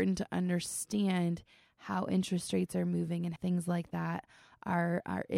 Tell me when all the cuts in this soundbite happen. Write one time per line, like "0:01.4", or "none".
0:03.4